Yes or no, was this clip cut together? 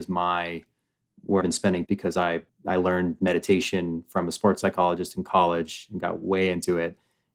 yes